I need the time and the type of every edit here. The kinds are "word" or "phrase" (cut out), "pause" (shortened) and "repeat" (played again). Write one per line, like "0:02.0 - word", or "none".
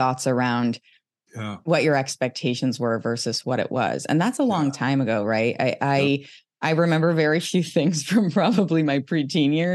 none